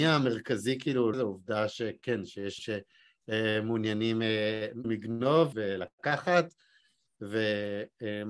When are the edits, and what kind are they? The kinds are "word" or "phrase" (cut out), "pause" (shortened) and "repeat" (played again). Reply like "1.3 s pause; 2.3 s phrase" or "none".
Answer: 1.1 s word; 2.6 s word; 4.8 s word; 5.5 s word